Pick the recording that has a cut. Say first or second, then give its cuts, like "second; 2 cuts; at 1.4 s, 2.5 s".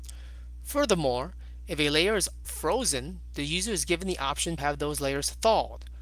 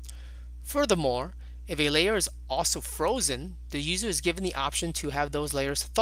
first; 2 cuts; at 2.4 s, 4.6 s